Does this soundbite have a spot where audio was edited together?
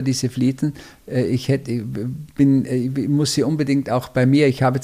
no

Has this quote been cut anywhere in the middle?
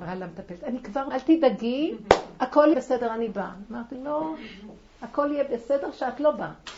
yes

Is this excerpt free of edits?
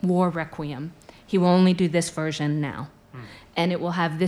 yes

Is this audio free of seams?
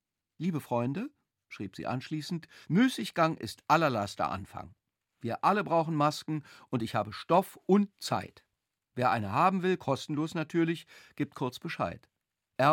no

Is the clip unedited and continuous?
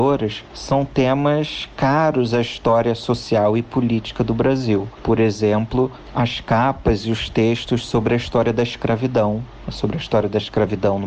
yes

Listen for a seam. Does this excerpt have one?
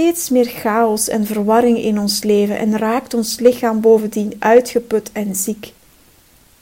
no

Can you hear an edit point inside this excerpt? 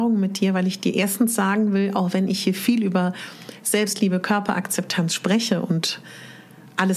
no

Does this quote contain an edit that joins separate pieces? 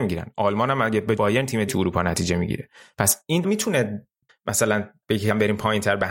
yes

